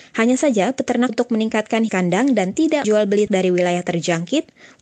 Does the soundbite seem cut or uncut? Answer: cut